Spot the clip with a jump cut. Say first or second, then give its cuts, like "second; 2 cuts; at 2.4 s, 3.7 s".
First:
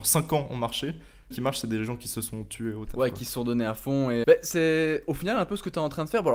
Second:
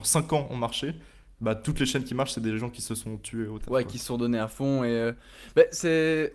first; 2 cuts; at 1.3 s, 4.2 s